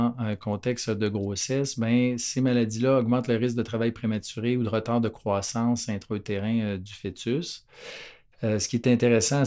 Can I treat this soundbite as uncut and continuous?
yes; 0 cuts

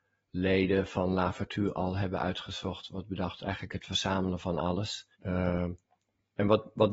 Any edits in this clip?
yes; 1 cut; at 5.1 s

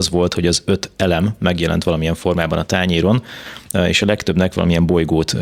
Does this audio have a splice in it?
no; 0 cuts

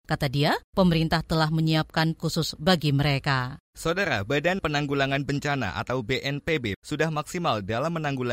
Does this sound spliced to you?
yes; 3 cuts; at 2.2 s, 4.6 s, 6.7 s

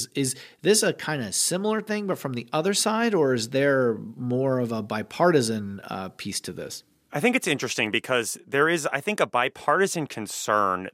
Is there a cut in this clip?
no; 0 cuts

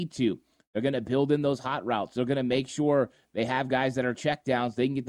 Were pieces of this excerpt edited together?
no; 0 cuts

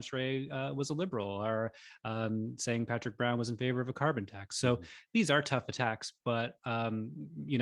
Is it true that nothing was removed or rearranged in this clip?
yes; 0 cuts

